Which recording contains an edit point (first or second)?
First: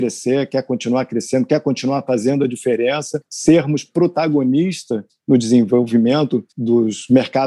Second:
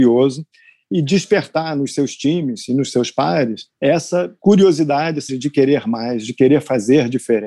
second